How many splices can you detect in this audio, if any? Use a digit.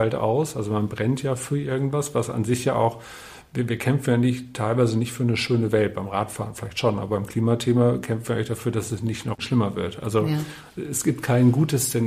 0